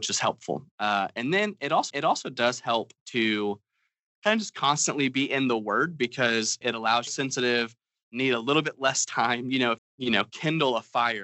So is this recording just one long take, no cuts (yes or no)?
no